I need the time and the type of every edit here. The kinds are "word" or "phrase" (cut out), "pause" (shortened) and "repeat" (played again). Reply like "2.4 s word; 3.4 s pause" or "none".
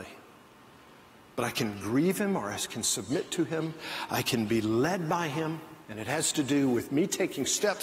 5.8 s pause